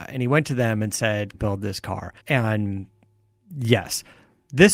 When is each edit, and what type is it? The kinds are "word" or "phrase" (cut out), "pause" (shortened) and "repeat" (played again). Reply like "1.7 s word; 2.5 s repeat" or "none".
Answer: 1.3 s phrase; 2.2 s pause